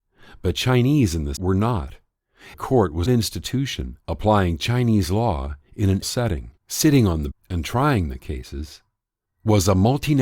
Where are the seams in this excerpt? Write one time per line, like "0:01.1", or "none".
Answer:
0:01.4
0:02.5
0:03.1
0:04.0
0:06.0
0:06.6
0:07.3